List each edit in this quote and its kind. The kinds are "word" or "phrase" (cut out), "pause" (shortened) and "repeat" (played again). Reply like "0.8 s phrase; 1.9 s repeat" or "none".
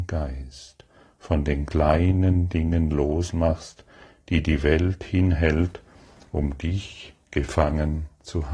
none

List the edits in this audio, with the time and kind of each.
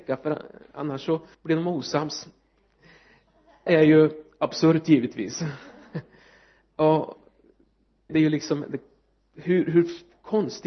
1.3 s pause; 3.7 s word; 8.1 s word

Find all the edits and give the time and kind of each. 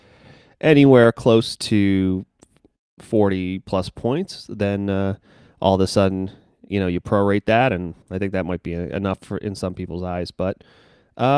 8.0 s pause

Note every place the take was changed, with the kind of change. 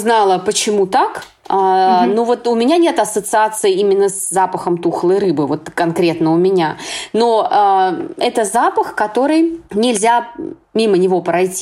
9.6 s pause

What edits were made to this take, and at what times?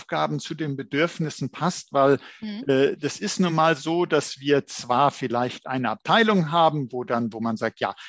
none

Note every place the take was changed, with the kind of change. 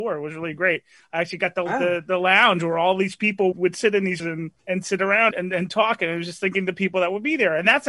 3.5 s word; 4.2 s phrase; 4.6 s pause; 5.3 s word

